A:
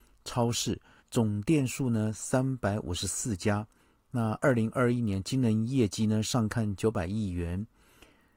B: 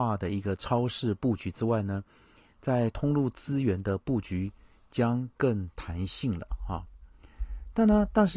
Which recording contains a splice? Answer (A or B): A